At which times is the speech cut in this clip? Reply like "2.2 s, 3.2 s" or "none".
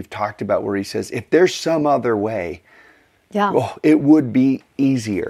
none